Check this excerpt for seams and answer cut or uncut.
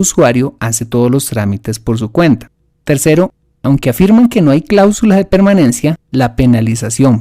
uncut